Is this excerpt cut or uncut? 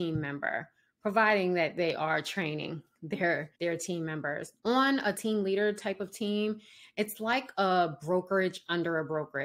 cut